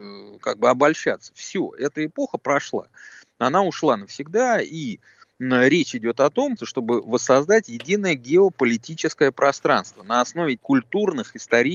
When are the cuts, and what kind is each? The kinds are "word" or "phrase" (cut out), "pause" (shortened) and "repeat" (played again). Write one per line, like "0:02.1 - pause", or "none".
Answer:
0:06.6 - word
0:10.6 - word